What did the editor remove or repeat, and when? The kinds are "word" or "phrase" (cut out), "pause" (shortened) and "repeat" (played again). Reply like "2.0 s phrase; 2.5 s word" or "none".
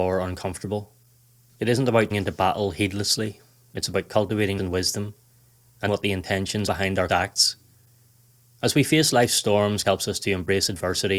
2.1 s word; 4.6 s word; 5.9 s word; 6.7 s word; 7.1 s word; 9.8 s word